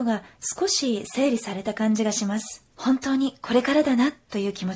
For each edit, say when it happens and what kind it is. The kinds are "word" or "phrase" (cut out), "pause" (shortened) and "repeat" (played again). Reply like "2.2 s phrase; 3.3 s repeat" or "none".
2.7 s pause